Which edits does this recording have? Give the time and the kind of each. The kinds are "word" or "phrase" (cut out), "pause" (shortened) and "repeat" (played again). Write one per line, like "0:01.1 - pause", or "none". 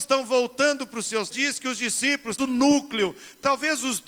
0:01.3 - phrase
0:02.4 - word